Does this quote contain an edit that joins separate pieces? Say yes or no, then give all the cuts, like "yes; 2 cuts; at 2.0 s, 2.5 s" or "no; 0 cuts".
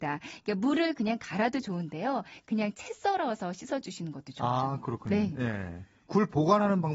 no; 0 cuts